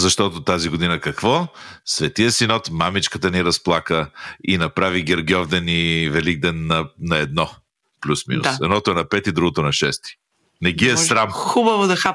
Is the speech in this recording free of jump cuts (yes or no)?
yes